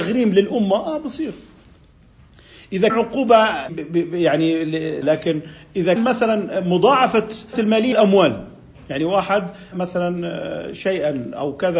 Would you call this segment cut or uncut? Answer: cut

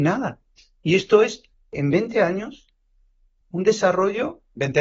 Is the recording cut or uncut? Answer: cut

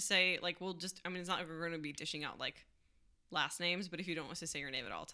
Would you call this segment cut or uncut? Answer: uncut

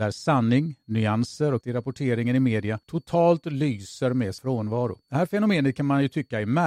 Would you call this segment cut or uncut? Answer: cut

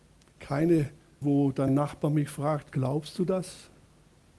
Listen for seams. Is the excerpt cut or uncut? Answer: cut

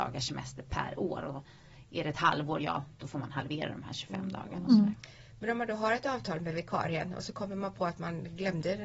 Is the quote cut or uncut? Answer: uncut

